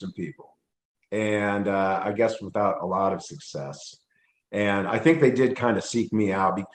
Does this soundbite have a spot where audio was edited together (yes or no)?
no